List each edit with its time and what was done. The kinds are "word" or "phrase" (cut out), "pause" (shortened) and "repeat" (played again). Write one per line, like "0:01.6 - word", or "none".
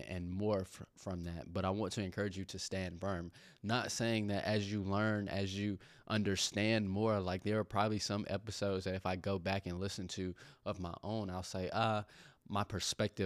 none

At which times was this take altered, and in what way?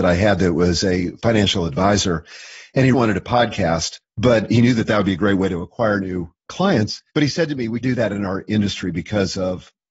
0:02.9 - word
0:04.0 - pause
0:07.1 - pause
0:07.8 - word

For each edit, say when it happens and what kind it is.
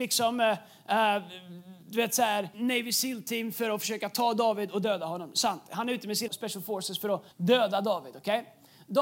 0:02.5 - word
0:06.3 - word
0:07.3 - pause

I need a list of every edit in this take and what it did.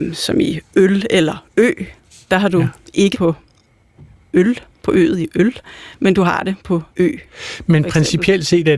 0:03.1 - word
0:06.9 - pause

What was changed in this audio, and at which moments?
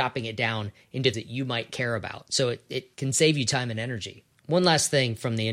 0:01.1 - word
0:02.9 - pause
0:04.4 - pause

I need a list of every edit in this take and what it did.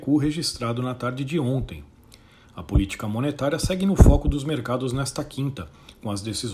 none

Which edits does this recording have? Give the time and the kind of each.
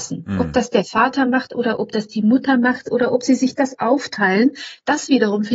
none

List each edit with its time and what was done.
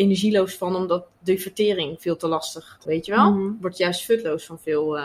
0:02.8 - word

